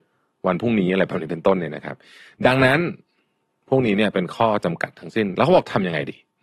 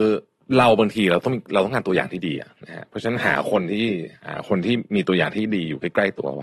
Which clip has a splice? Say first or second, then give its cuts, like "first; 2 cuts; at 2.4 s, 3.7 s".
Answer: second; 1 cut; at 2.5 s